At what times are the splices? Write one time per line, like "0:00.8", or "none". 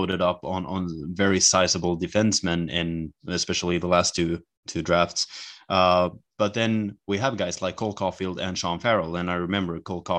0:07.7